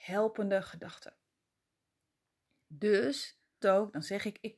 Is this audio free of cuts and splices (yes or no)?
no